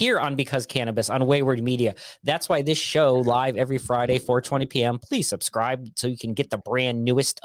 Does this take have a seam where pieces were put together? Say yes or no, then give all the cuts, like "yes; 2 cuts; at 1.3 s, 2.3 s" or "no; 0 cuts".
no; 0 cuts